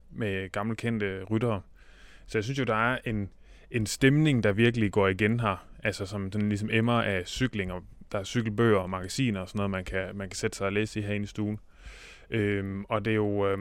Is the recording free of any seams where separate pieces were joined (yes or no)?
yes